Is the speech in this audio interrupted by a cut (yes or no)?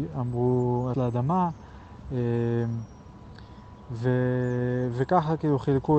yes